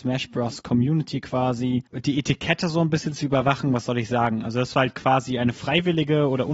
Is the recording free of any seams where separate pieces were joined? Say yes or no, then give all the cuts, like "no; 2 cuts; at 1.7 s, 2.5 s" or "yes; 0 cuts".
yes; 0 cuts